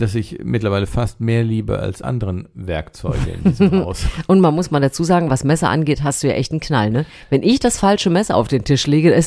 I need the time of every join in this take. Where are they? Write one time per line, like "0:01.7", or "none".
0:02.0